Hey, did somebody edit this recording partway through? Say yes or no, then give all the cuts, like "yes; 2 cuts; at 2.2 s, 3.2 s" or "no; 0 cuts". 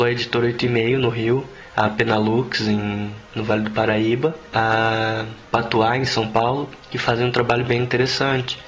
no; 0 cuts